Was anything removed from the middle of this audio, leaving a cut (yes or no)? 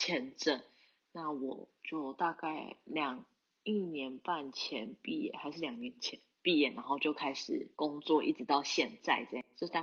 yes